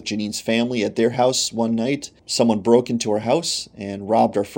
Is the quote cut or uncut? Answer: cut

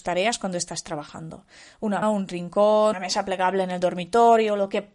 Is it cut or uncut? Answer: cut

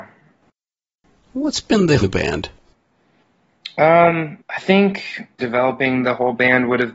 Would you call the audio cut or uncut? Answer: cut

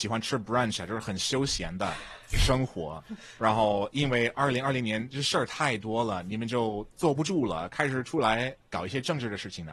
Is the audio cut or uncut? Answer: cut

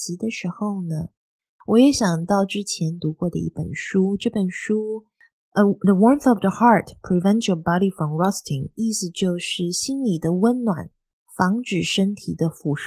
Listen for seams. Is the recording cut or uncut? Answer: uncut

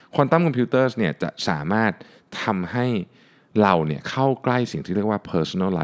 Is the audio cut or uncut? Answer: uncut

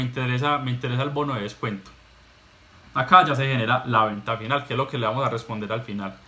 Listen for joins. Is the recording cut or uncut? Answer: uncut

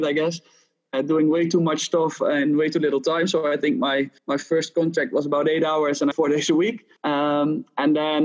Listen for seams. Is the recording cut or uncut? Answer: cut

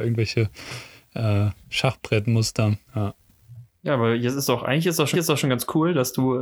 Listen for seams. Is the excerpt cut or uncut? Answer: cut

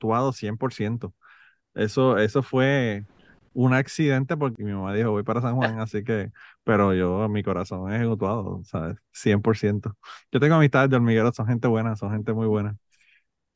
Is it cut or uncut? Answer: uncut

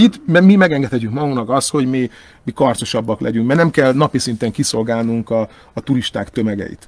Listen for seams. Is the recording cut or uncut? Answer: uncut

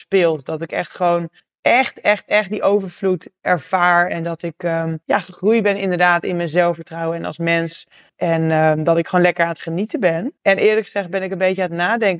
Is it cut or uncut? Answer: cut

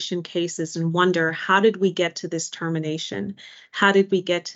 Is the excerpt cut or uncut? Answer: uncut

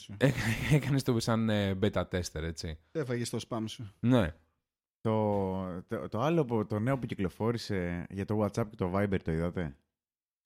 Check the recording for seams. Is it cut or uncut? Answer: uncut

